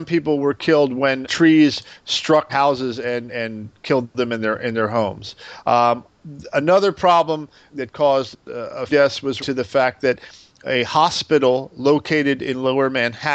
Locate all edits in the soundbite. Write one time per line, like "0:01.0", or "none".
0:01.2
0:02.5
0:03.3
0:07.7
0:08.9
0:09.4